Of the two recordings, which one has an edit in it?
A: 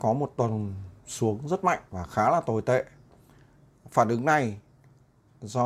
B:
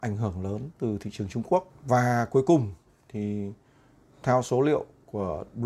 A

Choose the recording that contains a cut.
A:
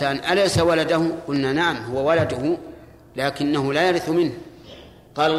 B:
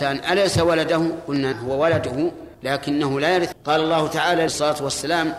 B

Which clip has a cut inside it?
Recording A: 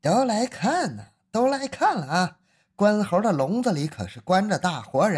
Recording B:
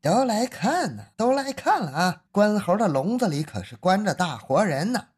B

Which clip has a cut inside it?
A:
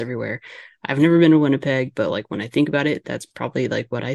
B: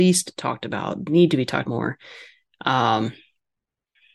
B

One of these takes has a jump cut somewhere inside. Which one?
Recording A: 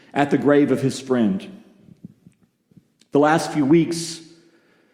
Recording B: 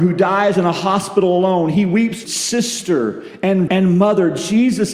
B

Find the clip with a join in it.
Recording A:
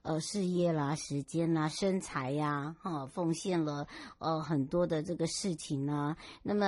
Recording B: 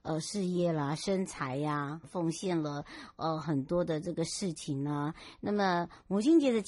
B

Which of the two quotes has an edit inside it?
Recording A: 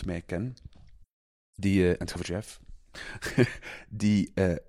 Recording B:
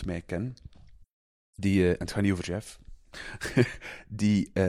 A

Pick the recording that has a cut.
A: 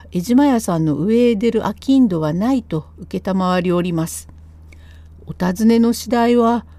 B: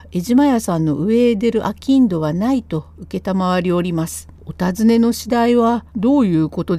B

